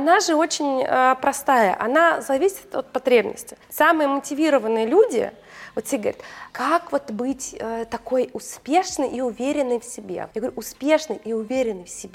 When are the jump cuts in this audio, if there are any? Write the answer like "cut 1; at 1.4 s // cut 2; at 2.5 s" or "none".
cut 1; at 3.6 s // cut 2; at 6.5 s // cut 3; at 10.3 s